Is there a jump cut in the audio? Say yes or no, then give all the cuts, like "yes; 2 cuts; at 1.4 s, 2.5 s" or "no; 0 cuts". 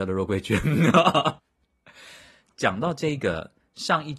yes; 1 cut; at 1.4 s